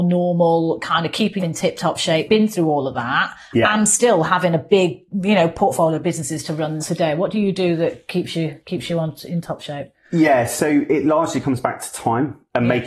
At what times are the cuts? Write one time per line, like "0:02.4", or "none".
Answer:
0:01.4
0:02.3
0:06.8